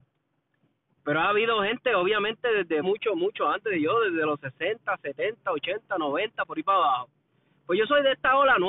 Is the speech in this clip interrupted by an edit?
yes; 2 cuts; at 1.0 s, 2.8 s

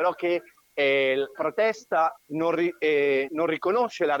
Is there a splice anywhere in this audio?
yes; 3 cuts; at 1.3 s, 2.2 s, 3.3 s

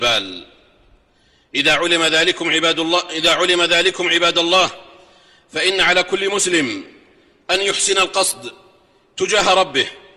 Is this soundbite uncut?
yes; 0 cuts

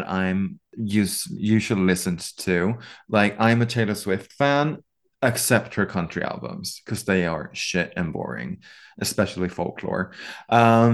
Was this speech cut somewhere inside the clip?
no; 0 cuts

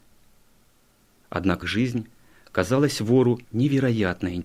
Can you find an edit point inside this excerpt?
yes; 2 cuts; at 1.6 s, 3.4 s

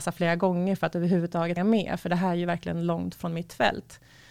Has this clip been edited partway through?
yes; 1 cut; at 1.6 s

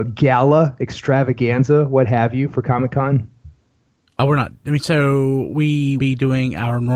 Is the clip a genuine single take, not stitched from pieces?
no; 1 cut; at 6.0 s

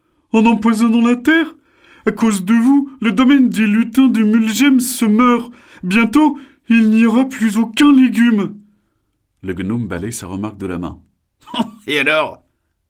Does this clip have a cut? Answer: no; 0 cuts

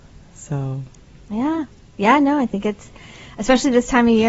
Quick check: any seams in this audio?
no; 0 cuts

